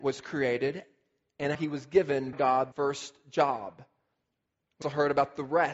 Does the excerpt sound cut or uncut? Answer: cut